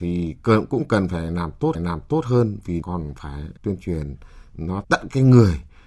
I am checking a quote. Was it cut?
yes; 4 cuts; at 1.7 s, 2.8 s, 3.6 s, 4.8 s

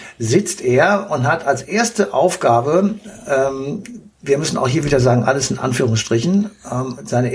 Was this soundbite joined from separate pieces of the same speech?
no; 0 cuts

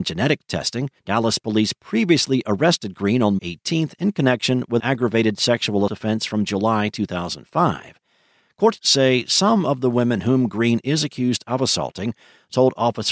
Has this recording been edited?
yes; 5 cuts; at 1.0 s, 3.4 s, 4.8 s, 5.9 s, 8.8 s

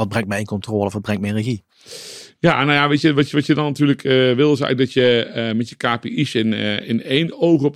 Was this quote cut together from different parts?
no; 0 cuts

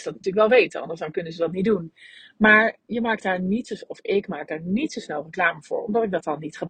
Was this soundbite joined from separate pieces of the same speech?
no; 0 cuts

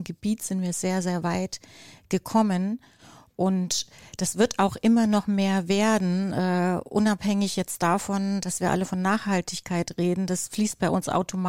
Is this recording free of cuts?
yes; 0 cuts

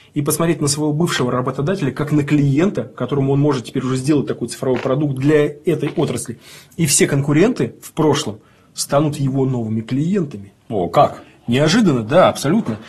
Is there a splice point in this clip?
no; 0 cuts

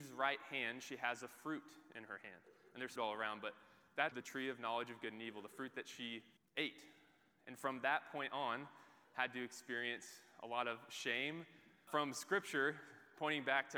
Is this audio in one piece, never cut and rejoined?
no; 4 cuts; at 3.0 s, 4.1 s, 6.4 s, 11.9 s

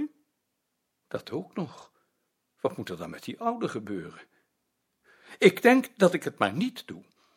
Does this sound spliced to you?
no; 0 cuts

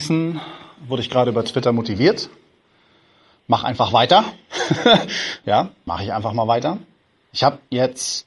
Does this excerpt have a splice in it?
yes; 2 cuts; at 5.4 s, 5.9 s

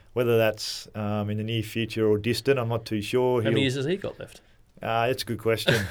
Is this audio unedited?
yes; 0 cuts

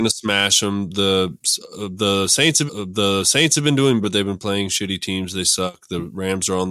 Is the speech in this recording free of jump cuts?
no; 2 cuts; at 2.7 s, 4.0 s

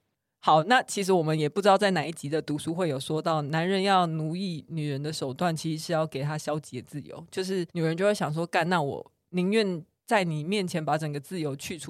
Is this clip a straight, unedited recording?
no; 1 cut; at 7.7 s

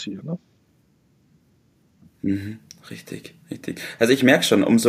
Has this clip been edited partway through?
yes; 1 cut; at 3.4 s

